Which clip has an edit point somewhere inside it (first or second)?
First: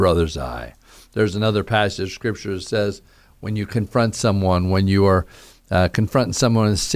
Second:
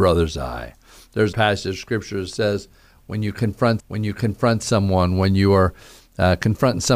second